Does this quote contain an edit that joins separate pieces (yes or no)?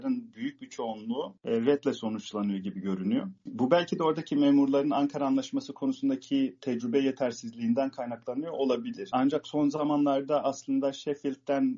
no